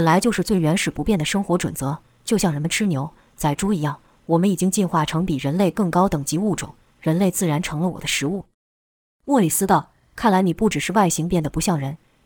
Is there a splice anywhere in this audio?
no; 0 cuts

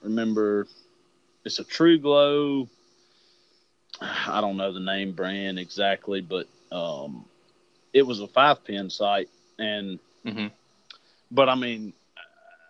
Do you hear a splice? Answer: no; 0 cuts

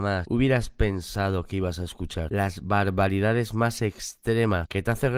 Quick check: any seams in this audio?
no; 0 cuts

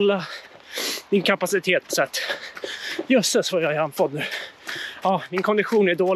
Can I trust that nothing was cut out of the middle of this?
no; 1 cut; at 1.9 s

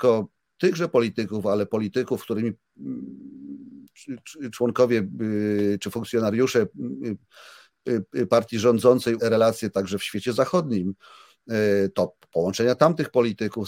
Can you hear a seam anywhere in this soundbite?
yes; 1 cut; at 9.2 s

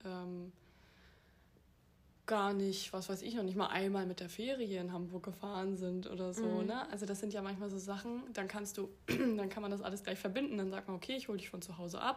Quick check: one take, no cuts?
yes; 0 cuts

